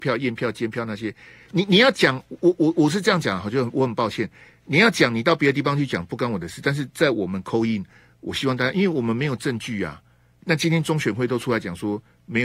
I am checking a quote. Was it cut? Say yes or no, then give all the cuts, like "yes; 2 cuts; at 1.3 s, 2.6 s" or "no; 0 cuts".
no; 0 cuts